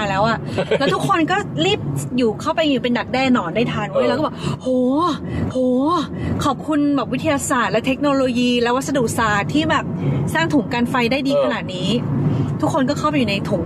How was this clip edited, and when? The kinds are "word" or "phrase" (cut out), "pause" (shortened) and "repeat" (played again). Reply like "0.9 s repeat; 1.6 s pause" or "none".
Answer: 5.5 s repeat